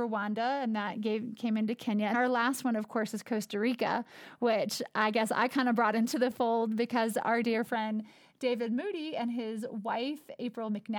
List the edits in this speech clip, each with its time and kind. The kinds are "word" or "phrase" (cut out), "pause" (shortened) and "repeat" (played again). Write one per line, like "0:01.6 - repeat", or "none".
0:02.1 - word
0:07.4 - word